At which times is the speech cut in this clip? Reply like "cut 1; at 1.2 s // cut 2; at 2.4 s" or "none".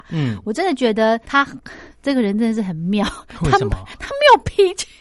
cut 1; at 1.2 s